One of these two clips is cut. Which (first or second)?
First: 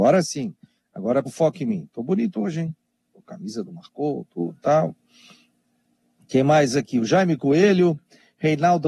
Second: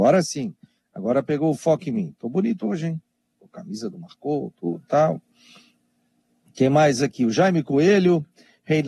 first